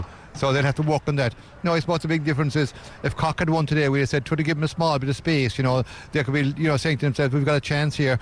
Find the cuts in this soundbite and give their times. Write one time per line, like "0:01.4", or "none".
none